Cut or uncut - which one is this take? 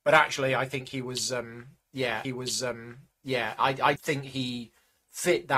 cut